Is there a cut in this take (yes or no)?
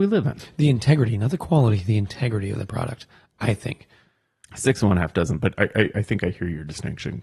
no